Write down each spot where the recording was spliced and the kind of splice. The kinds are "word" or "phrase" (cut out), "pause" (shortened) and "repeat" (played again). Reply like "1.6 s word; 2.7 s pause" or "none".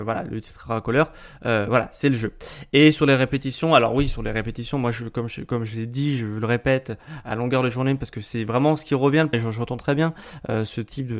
9.3 s word

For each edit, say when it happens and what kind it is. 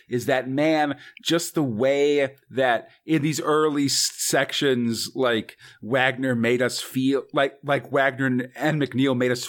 none

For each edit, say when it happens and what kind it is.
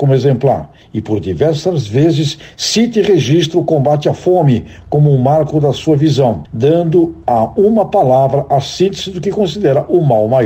none

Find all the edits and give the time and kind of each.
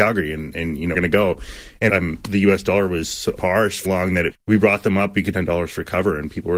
0.9 s word; 1.9 s word; 3.4 s word; 3.8 s word; 4.3 s word; 5.3 s word

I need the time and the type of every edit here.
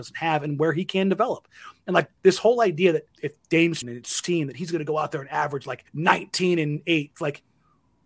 2.2 s pause; 3.1 s pause; 3.8 s word; 4.2 s word; 5.9 s pause

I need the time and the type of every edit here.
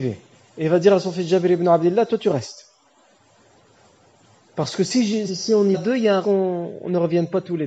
5.3 s word; 5.7 s word; 6.2 s word

